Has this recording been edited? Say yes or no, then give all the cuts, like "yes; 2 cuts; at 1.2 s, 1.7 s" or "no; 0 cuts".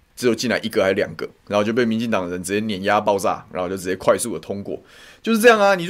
no; 0 cuts